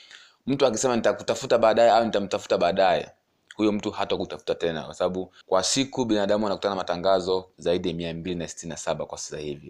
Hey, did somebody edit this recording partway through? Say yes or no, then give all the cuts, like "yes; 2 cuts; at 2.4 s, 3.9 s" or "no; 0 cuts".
yes; 3 cuts; at 3.3 s, 5.4 s, 7.5 s